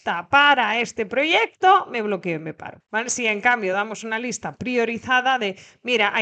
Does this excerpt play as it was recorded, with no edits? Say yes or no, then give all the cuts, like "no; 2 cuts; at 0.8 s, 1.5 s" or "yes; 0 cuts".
yes; 0 cuts